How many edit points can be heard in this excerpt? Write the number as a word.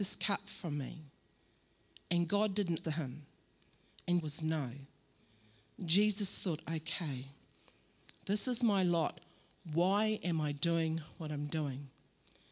two